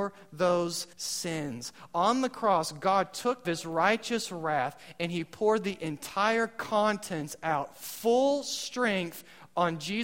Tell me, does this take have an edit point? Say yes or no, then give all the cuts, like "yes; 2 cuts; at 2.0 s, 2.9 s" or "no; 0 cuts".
yes; 2 cuts; at 0.9 s, 3.4 s